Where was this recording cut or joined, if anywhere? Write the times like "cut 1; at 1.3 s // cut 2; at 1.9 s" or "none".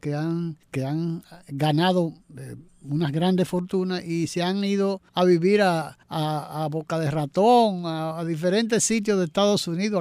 cut 1; at 5.1 s // cut 2; at 6.0 s

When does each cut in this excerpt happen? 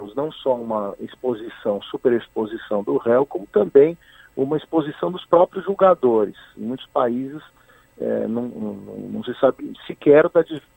none

